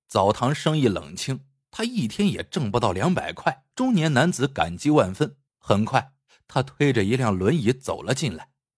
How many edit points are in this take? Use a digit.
2